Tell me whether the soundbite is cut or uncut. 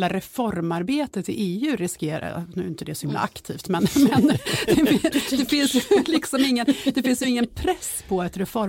uncut